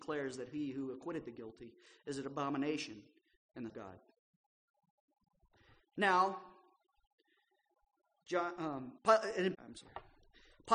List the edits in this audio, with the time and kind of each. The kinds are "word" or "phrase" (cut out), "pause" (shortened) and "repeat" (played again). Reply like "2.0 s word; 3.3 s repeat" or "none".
3.7 s phrase; 9.0 s pause; 9.5 s word